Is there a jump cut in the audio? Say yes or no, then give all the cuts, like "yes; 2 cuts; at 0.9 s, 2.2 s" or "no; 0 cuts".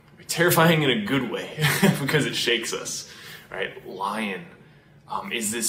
no; 0 cuts